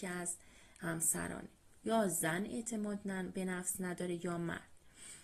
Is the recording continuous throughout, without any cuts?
yes; 0 cuts

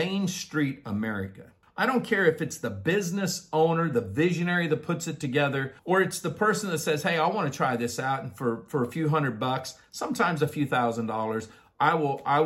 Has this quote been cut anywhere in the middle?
yes; 2 cuts; at 1.6 s, 5.8 s

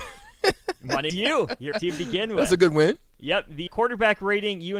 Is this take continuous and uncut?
no; 3 cuts; at 1.1 s, 1.7 s, 3.7 s

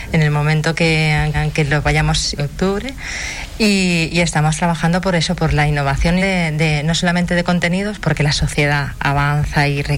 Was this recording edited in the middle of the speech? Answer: yes; 3 cuts; at 1.3 s, 2.4 s, 6.2 s

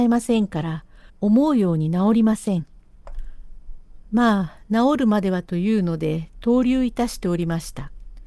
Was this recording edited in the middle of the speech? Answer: yes; 1 cut; at 1.1 s

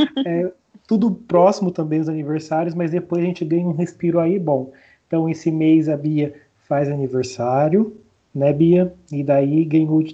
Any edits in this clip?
no; 0 cuts

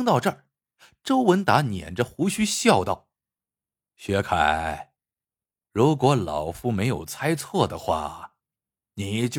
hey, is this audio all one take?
no; 1 cut; at 3.5 s

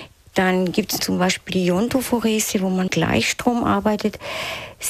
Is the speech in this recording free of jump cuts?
no; 2 cuts; at 1.0 s, 2.9 s

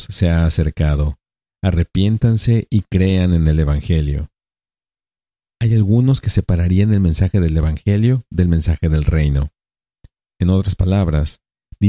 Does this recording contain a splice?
no; 0 cuts

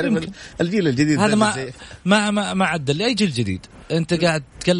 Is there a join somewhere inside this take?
no; 0 cuts

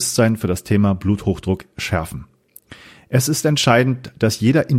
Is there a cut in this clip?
no; 0 cuts

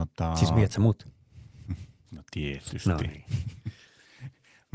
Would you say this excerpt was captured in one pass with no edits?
yes; 0 cuts

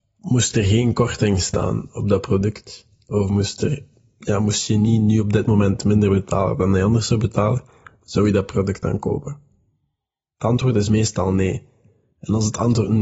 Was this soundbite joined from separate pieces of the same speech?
no; 0 cuts

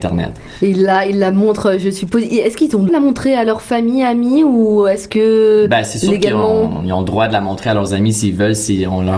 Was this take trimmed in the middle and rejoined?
yes; 1 cut; at 2.9 s

